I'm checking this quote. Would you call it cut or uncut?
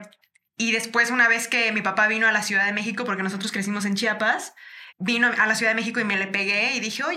cut